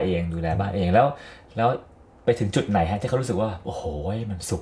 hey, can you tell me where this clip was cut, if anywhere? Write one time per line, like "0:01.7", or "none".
none